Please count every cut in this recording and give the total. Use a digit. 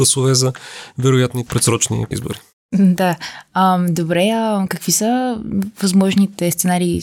2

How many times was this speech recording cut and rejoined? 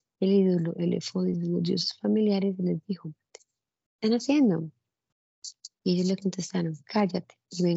0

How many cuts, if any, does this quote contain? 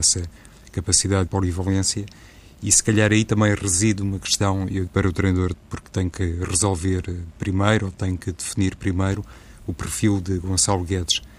3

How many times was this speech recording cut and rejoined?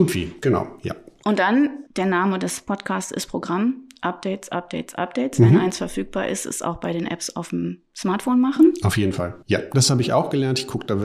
2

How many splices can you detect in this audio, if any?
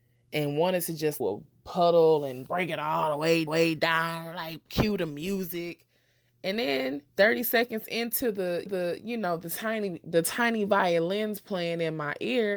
6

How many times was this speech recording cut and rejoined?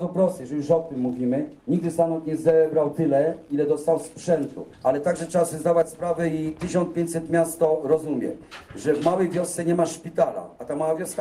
2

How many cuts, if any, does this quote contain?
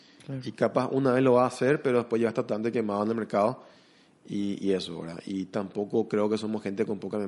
0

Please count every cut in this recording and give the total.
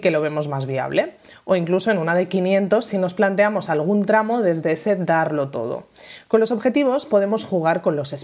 0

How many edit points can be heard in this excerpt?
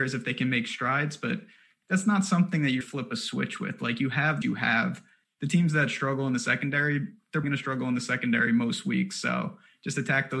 3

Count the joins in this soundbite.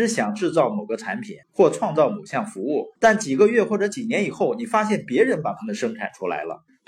2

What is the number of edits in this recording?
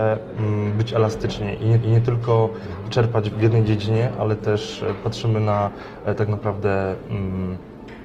2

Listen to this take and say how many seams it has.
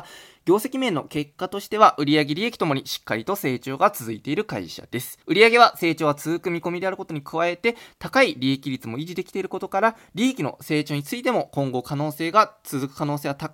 1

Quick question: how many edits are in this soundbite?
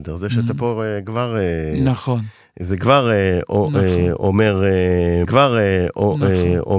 1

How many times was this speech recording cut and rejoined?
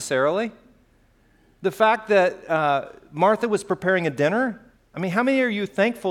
1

